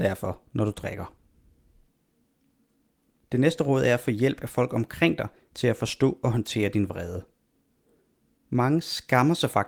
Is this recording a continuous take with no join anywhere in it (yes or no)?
yes